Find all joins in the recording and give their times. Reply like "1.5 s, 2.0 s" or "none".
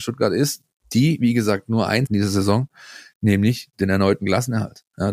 2.1 s